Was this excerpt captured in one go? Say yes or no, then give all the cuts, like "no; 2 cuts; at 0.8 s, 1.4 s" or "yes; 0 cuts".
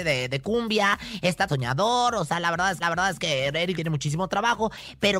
no; 3 cuts; at 1.5 s, 2.8 s, 3.8 s